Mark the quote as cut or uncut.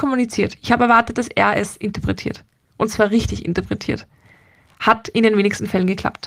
uncut